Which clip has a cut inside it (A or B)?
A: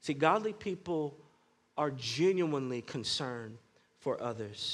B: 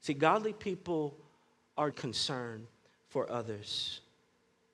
B